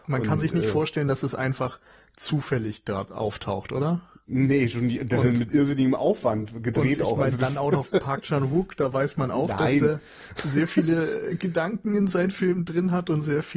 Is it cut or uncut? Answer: uncut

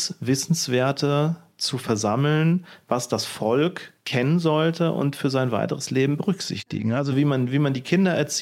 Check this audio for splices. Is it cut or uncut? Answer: uncut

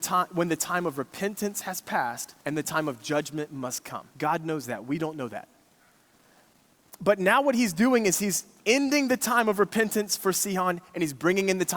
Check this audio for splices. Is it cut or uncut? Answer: cut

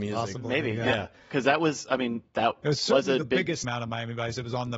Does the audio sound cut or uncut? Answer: cut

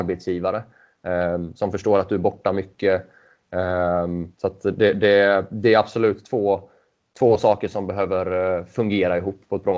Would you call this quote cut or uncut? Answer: cut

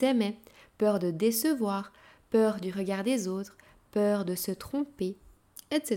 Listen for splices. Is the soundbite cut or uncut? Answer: uncut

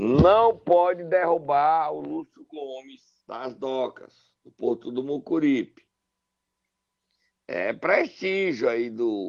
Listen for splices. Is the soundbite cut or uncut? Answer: cut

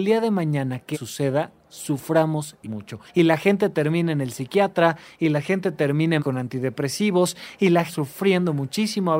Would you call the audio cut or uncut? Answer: cut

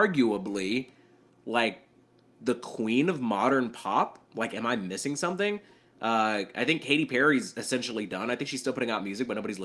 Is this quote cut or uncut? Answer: uncut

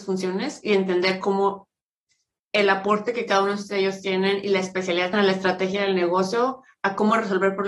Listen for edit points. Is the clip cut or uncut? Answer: cut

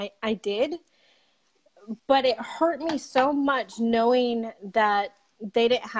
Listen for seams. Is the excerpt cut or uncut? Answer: cut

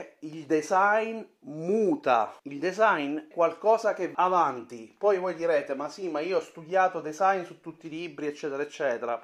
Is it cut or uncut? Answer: cut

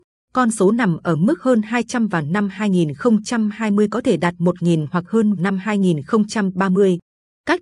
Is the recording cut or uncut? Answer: cut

